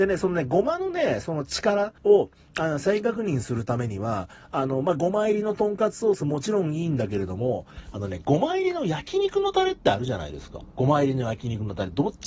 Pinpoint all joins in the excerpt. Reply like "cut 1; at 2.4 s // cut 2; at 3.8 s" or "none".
cut 1; at 2.0 s